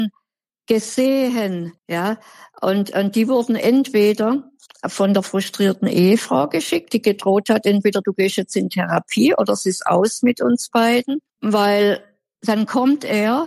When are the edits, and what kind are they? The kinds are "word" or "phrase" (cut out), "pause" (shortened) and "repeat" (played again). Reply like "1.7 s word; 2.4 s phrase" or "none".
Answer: 1.8 s pause; 4.7 s pause; 11.3 s pause